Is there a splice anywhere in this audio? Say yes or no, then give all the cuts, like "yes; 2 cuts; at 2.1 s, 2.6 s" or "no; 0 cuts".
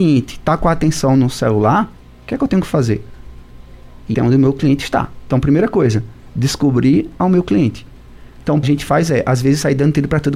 yes; 4 cuts; at 2.0 s, 4.1 s, 7.2 s, 8.6 s